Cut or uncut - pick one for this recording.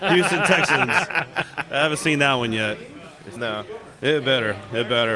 cut